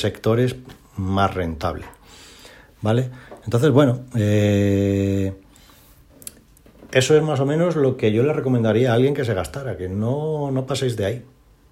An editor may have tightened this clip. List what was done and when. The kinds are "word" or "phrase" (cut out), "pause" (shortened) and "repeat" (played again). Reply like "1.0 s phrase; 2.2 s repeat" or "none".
none